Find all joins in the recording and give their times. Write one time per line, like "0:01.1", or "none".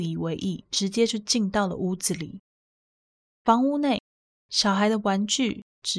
none

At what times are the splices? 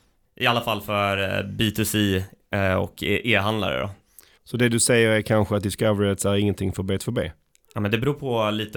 none

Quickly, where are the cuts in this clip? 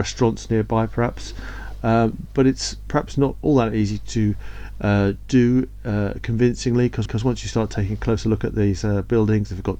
0:07.1

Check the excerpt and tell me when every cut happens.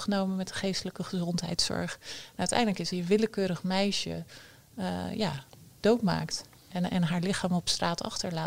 0:02.9

